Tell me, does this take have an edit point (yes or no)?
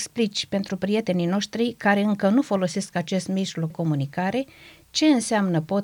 yes